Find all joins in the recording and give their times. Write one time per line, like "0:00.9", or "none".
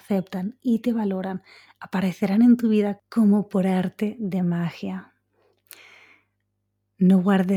none